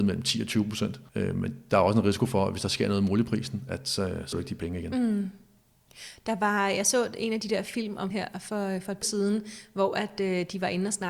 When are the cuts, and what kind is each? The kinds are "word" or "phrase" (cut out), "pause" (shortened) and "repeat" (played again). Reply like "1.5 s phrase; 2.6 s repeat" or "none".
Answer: 1.1 s pause; 4.3 s word; 8.1 s word; 9.0 s word